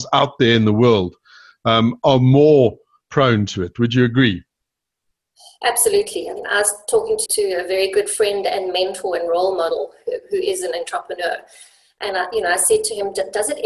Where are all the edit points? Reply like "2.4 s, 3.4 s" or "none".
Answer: 7.3 s